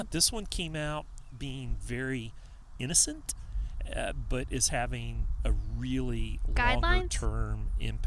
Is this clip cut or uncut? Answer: uncut